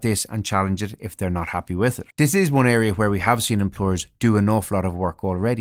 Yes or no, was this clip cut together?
yes